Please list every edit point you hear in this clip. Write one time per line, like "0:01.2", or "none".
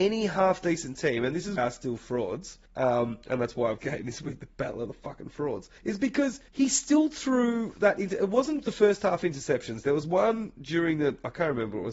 0:01.6
0:02.7
0:03.8
0:05.8
0:06.5
0:08.6

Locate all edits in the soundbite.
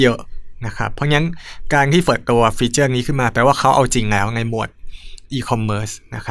0:02.0

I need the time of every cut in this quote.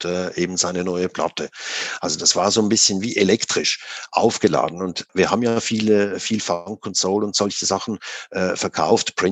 none

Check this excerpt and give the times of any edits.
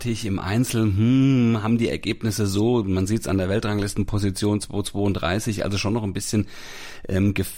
none

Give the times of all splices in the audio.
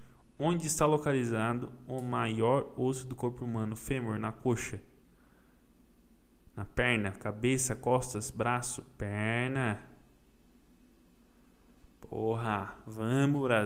none

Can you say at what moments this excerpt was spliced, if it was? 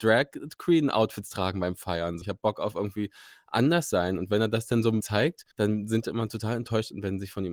0:02.2
0:05.0
0:05.5
0:06.0

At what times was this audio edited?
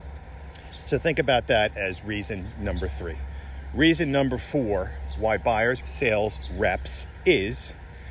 0:05.8

